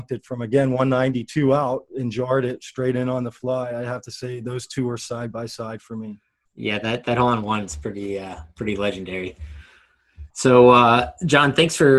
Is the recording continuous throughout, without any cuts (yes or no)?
no